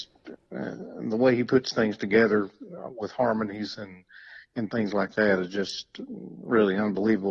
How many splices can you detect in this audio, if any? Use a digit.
0